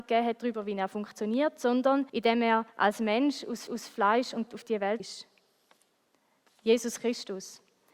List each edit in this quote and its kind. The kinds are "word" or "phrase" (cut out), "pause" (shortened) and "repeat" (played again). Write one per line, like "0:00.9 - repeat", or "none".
0:02.1 - pause
0:02.7 - pause
0:03.7 - repeat
0:04.5 - word
0:05.0 - word